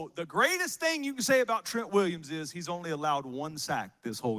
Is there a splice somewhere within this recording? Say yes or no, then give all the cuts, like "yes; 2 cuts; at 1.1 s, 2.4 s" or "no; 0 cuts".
no; 0 cuts